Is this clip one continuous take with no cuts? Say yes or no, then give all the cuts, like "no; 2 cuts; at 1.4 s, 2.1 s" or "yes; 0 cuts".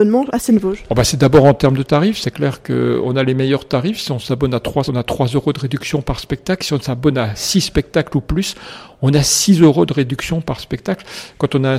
no; 1 cut; at 4.8 s